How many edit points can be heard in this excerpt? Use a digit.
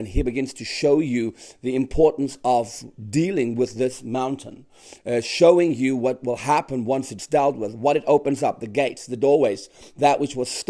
0